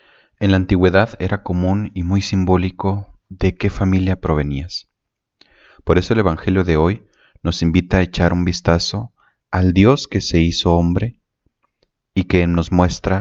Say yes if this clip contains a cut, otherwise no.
no